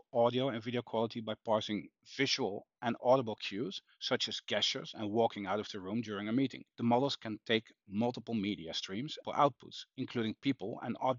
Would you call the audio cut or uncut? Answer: cut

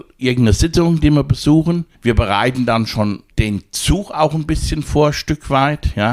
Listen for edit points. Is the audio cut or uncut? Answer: cut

